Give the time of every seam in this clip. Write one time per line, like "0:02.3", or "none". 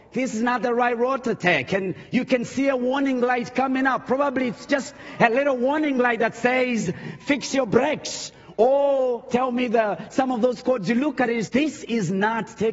0:11.5